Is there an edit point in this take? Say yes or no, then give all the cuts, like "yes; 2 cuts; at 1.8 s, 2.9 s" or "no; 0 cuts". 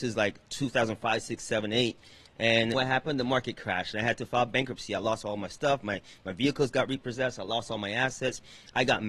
yes; 1 cut; at 2.7 s